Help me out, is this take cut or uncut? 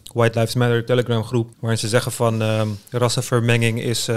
cut